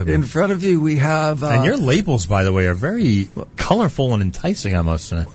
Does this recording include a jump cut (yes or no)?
no